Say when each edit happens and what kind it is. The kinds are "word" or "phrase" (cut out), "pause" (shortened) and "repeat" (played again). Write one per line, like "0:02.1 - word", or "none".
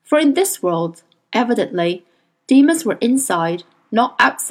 none